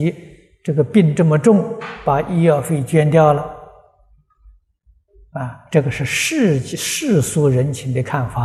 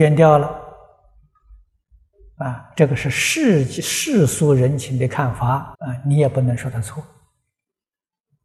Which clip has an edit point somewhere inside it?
second; 1 cut; at 5.7 s

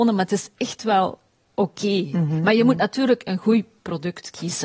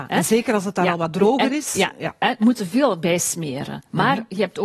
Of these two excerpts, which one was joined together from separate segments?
second; 1 cut; at 2.4 s

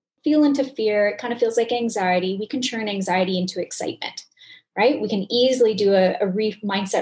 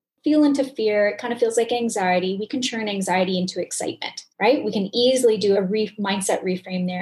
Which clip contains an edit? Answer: second; 2 cuts; at 4.3 s, 5.5 s

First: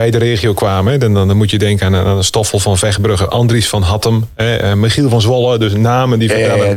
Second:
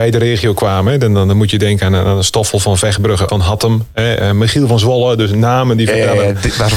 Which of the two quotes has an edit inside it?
second; 1 cut; at 3.3 s

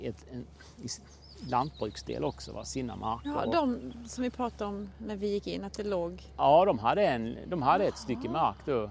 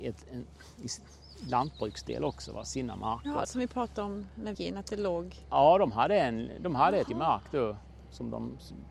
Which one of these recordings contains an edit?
second; 3 cuts; at 3.4 s, 4.5 s, 7.1 s

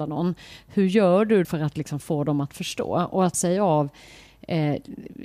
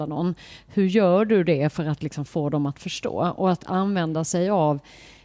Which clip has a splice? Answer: first; 2 cuts; at 1.4 s, 3.3 s

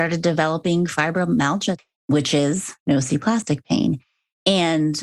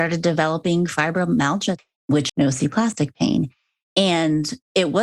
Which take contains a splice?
second; 1 cut; at 2.3 s

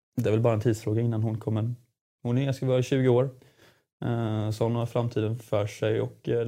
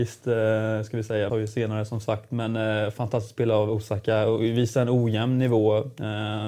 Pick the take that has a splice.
second; 1 cut; at 1.3 s

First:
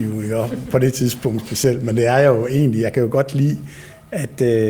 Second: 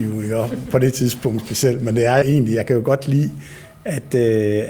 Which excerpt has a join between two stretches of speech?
second; 1 cut; at 2.2 s

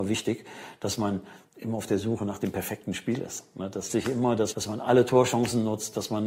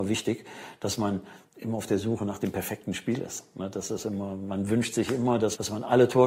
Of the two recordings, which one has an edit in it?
first; 1 cut; at 3.9 s

